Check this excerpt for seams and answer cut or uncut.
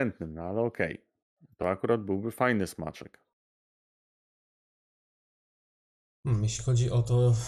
uncut